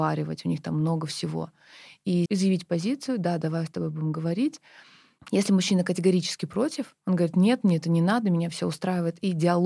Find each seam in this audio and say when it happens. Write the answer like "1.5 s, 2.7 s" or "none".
2.3 s